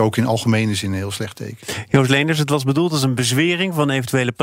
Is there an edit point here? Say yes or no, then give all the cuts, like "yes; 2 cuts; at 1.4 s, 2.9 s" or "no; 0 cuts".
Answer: no; 0 cuts